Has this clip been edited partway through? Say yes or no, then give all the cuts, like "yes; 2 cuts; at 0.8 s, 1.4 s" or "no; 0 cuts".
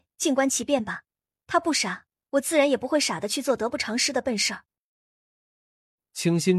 no; 0 cuts